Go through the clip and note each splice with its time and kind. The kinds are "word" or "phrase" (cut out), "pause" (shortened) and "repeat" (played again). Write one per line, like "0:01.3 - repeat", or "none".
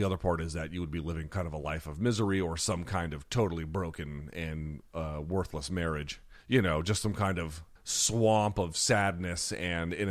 0:06.4 - pause
0:07.8 - pause